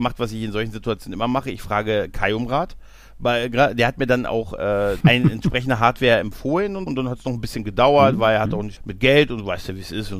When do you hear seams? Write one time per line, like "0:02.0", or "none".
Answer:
0:05.0
0:06.9
0:08.8